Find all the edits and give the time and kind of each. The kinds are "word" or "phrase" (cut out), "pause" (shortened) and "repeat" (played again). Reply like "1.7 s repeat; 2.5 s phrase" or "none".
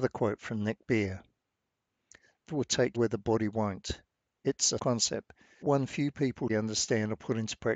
2.5 s word; 2.9 s word; 4.8 s word; 5.6 s word; 6.5 s word

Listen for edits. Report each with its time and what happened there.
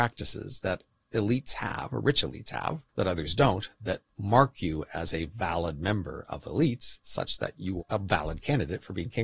2.9 s pause; 4.1 s pause; 7.8 s word

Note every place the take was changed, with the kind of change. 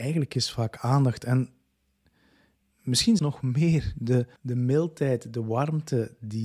3.2 s word; 4.4 s pause

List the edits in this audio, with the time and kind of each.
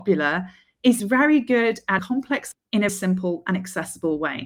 1.0 s word; 2.0 s word; 2.5 s word; 2.9 s word

